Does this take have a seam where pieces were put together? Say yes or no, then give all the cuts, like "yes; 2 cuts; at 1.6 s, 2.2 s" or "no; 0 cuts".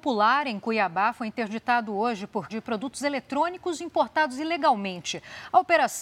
yes; 1 cut; at 2.5 s